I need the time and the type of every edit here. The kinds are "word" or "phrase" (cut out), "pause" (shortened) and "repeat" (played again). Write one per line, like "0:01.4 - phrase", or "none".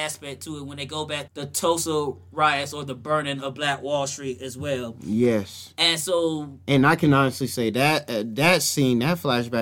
0:01.3 - word